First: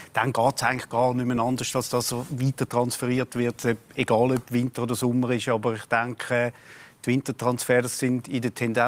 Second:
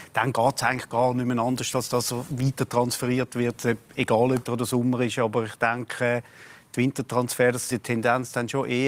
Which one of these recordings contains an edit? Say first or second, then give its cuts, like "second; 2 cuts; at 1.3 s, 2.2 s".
second; 2 cuts; at 4.5 s, 7.7 s